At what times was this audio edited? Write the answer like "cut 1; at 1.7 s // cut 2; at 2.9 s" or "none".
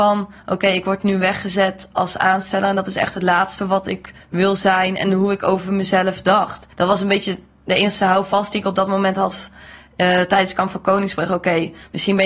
cut 1; at 4.2 s // cut 2; at 6.7 s